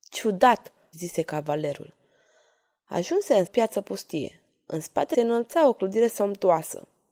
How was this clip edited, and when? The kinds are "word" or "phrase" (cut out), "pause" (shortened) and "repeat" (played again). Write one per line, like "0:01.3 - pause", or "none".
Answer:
0:00.9 - word
0:03.5 - phrase
0:05.1 - phrase